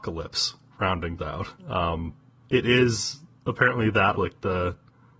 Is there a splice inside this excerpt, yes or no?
yes